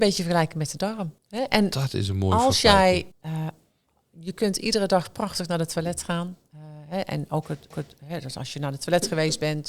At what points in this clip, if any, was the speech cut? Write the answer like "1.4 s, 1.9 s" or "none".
1.2 s, 3.1 s, 7.7 s